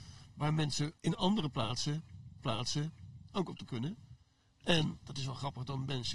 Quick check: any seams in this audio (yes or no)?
yes